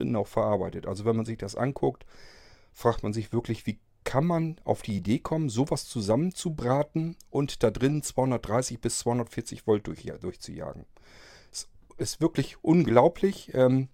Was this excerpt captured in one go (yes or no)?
yes